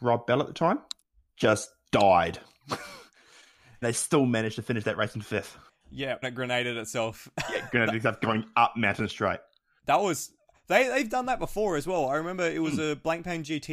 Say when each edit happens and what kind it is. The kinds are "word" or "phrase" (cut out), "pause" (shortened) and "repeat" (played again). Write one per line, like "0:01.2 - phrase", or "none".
0:01.0 - pause
0:03.8 - word
0:06.2 - word